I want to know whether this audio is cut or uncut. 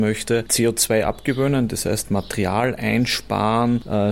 uncut